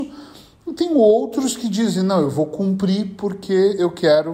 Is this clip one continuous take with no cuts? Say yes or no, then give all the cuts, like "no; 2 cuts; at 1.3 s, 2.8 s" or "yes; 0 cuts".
yes; 0 cuts